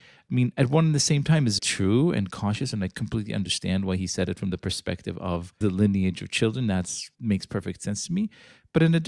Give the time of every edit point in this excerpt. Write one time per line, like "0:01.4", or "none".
0:01.6
0:05.6
0:07.1

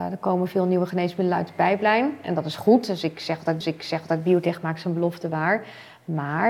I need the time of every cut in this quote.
0:03.6

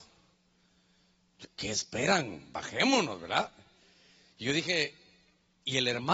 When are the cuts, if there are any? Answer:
0:01.4

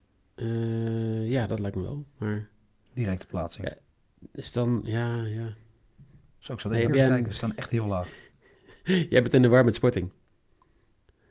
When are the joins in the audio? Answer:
0:06.9

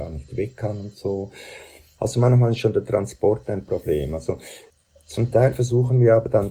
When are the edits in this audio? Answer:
none

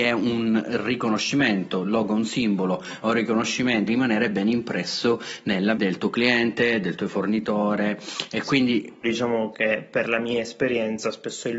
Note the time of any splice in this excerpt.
0:03.9
0:05.7
0:09.0

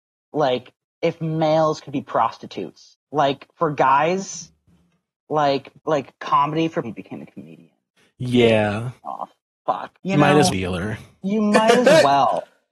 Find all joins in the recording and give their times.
0:03.1
0:05.8
0:06.8
0:09.0
0:09.9
0:10.5

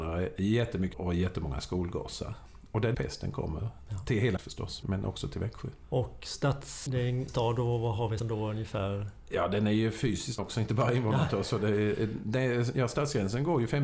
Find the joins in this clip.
0:00.9
0:02.9
0:04.4
0:04.8
0:06.9
0:07.3
0:08.2
0:10.4

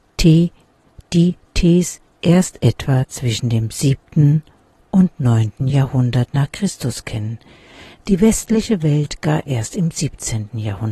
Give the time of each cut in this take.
none

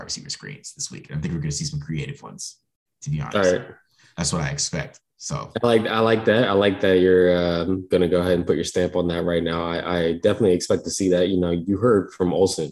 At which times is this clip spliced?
none

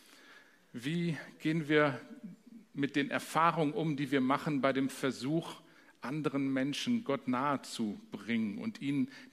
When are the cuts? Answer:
none

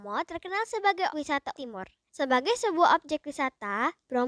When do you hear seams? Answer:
0:01.1
0:01.5

